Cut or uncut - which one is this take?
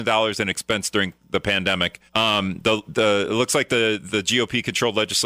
cut